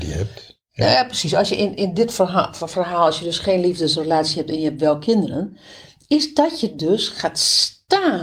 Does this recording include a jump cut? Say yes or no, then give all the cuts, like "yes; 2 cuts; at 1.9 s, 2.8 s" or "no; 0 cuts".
no; 0 cuts